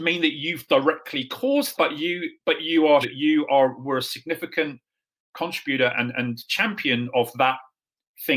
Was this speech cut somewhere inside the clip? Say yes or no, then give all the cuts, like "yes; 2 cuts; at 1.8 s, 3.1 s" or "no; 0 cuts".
yes; 3 cuts; at 1.7 s, 3.0 s, 5.9 s